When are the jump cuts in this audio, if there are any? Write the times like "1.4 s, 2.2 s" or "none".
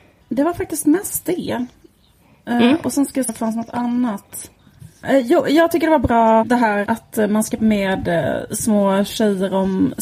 3.3 s, 6.4 s, 6.9 s, 7.6 s